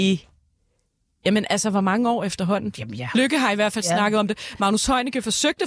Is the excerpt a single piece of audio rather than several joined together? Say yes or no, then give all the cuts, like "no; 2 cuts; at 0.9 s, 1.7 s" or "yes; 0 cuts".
yes; 0 cuts